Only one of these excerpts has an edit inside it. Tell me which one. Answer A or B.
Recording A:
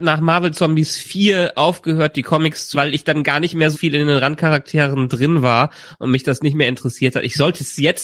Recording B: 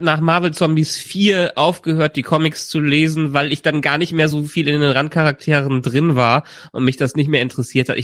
A